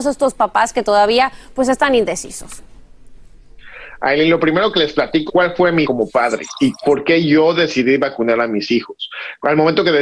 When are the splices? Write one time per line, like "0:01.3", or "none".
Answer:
0:05.3
0:05.8